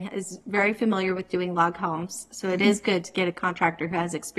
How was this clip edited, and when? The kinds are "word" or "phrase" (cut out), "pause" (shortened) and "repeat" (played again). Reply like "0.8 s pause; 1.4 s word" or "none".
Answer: none